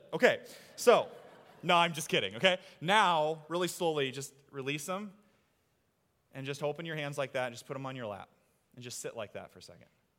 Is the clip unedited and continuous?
yes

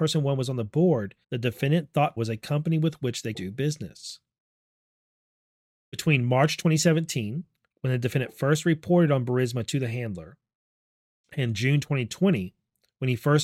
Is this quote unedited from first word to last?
no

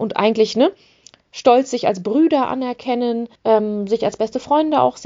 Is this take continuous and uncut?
no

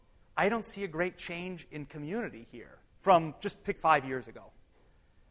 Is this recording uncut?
no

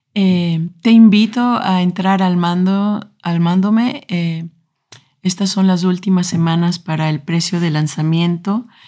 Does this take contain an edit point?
no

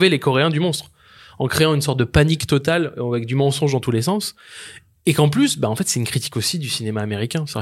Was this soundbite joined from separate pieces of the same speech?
no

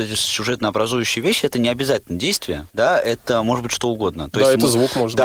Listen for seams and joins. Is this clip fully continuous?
no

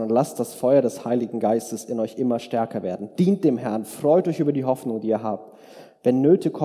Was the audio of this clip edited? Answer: no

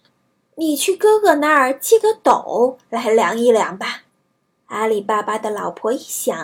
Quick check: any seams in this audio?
yes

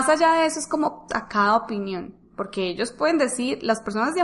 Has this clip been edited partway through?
yes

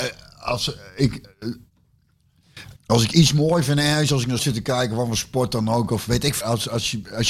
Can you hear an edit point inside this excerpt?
yes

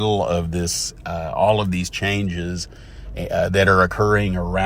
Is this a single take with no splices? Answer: yes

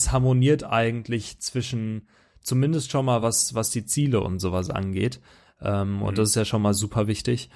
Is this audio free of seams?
yes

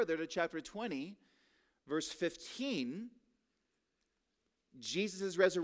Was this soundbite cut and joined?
no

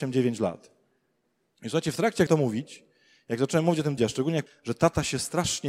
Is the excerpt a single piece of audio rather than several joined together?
no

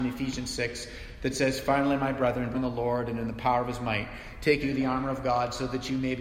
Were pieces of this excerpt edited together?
yes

